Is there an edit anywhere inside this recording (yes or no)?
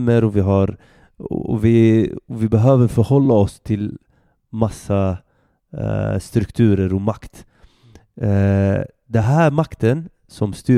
no